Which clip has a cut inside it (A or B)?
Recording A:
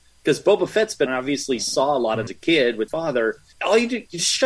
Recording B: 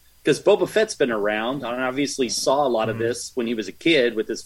A